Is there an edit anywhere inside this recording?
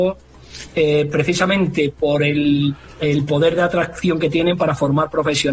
no; 0 cuts

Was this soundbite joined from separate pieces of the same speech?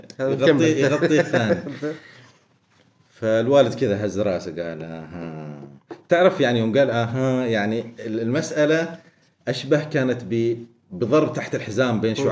no; 0 cuts

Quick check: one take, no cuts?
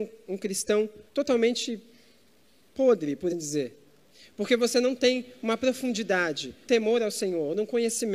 no; 3 cuts; at 1.1 s, 3.3 s, 6.7 s

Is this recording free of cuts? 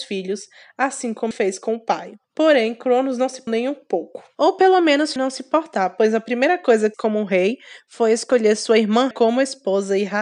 no; 7 cuts; at 1.3 s, 2.2 s, 3.5 s, 4.3 s, 5.2 s, 6.9 s, 9.1 s

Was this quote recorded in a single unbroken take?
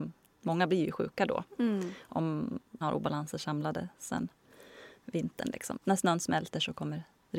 no; 2 cuts; at 2.8 s, 5.8 s

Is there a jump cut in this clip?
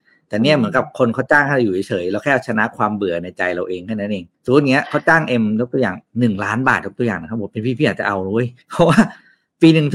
yes; 2 cuts; at 4.3 s, 8.6 s

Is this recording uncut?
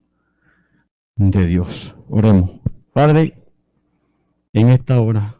no; 1 cut; at 2.8 s

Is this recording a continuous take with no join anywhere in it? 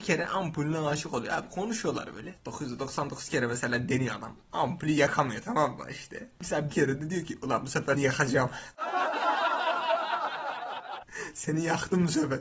no; 2 cuts; at 6.7 s, 7.9 s

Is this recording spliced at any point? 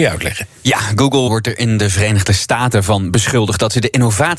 yes; 1 cut; at 1.3 s

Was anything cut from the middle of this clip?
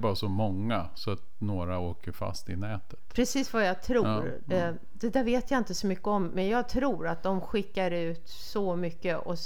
no; 0 cuts

